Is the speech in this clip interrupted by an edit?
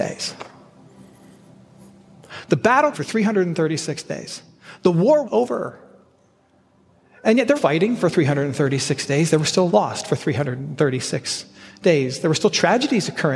yes; 4 cuts; at 2.9 s, 5.2 s, 7.6 s, 9.7 s

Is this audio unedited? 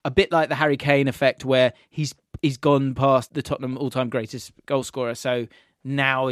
no; 1 cut; at 3.3 s

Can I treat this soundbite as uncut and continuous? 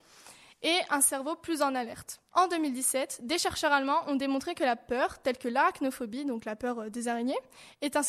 no; 1 cut; at 2.3 s

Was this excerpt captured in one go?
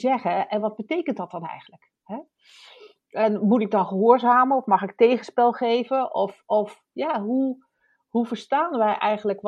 yes; 0 cuts

